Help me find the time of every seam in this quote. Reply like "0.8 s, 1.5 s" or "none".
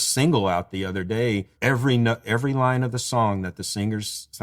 1.6 s